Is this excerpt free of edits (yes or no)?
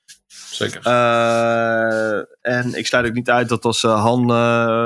no